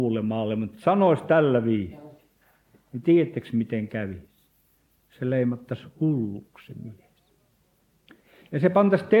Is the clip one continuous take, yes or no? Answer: yes